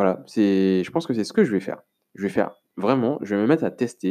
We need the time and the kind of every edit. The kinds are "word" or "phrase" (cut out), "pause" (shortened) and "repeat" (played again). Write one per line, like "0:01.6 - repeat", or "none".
none